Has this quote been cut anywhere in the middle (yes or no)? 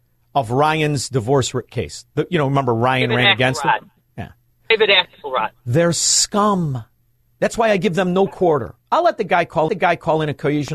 yes